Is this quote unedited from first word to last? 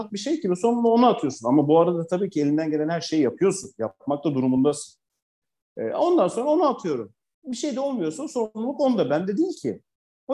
yes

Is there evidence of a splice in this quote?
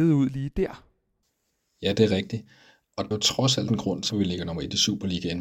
yes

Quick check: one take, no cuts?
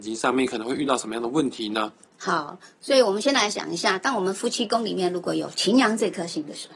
yes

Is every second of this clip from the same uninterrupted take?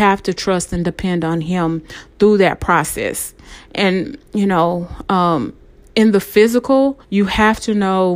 no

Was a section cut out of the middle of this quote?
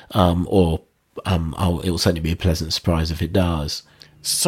no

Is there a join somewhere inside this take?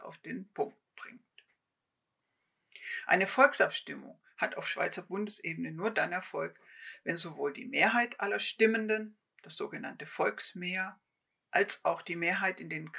no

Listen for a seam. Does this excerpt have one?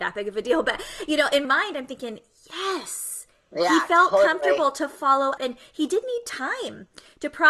yes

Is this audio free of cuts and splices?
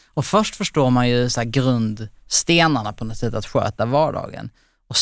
yes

